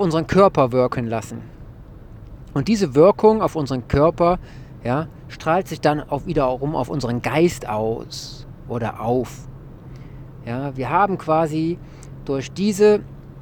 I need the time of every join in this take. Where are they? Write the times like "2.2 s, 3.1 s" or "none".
none